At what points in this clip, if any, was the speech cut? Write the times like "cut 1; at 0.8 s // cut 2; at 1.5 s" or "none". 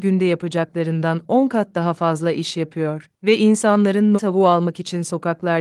cut 1; at 4.2 s